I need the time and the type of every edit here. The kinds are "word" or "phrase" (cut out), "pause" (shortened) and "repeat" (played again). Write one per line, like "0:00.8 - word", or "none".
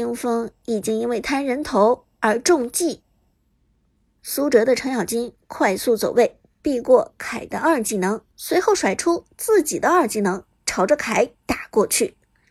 0:04.0 - pause
0:08.3 - pause